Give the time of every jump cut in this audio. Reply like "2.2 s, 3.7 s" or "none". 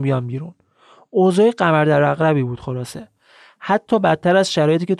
none